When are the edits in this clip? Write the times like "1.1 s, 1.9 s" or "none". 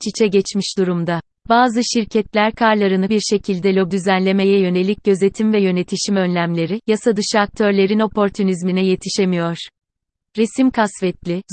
1.3 s, 3.1 s, 3.9 s

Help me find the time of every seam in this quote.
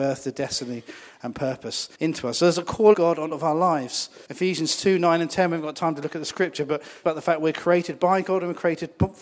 1.9 s, 2.9 s, 3.3 s, 4.2 s, 7.0 s

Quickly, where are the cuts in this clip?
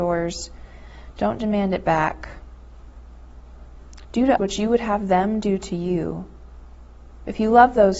4.4 s

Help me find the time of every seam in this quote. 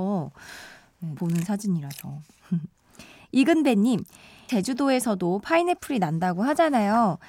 1.2 s, 4.5 s

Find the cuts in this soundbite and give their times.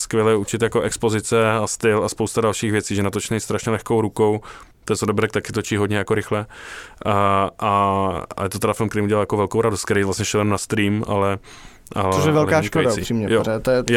4.7 s

